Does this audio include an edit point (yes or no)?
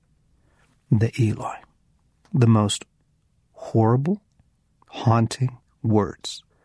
no